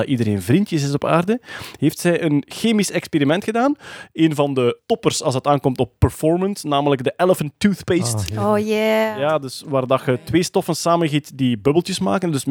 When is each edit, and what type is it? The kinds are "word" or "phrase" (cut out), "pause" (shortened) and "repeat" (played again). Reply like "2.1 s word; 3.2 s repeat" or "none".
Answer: none

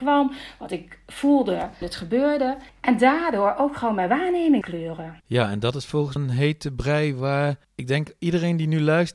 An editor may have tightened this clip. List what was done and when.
1.8 s word; 2.7 s pause; 4.6 s word; 5.2 s pause; 6.2 s phrase; 7.6 s pause

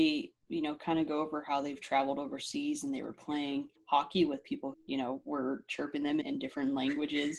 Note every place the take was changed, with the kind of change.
3.8 s pause; 4.7 s word; 6.2 s word

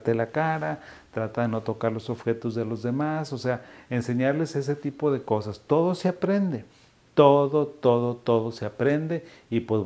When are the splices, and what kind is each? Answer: none

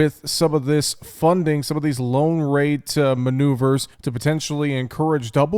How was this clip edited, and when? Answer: 3.9 s pause

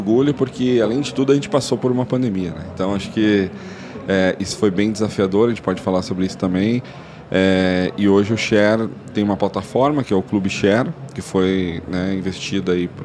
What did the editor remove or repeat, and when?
none

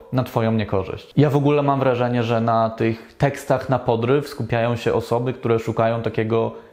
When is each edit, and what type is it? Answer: none

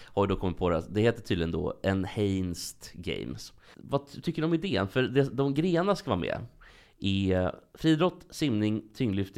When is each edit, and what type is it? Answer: none

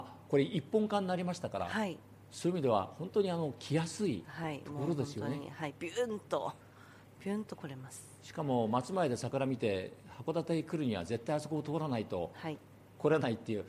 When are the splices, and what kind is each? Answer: 4.2 s phrase

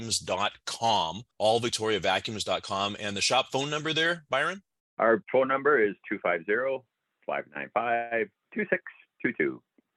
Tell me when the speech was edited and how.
1.3 s pause; 4.8 s pause

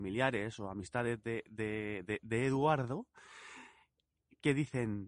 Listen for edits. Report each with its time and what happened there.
none

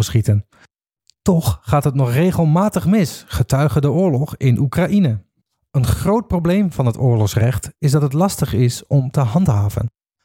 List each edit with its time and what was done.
5.4 s pause

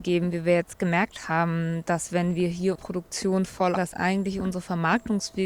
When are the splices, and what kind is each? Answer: 2.7 s word; 3.8 s word

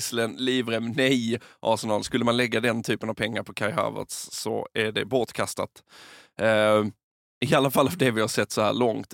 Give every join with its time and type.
none

